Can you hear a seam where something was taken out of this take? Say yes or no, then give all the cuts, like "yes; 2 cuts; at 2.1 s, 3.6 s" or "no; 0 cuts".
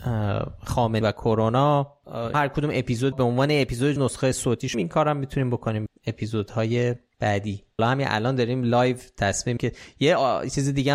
yes; 8 cuts; at 1.0 s, 2.3 s, 3.1 s, 4.0 s, 4.7 s, 5.9 s, 7.8 s, 9.6 s